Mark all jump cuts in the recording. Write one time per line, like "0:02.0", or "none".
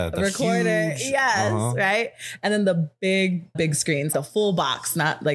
0:03.5
0:04.1